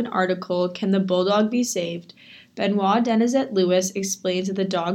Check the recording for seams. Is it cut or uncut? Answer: uncut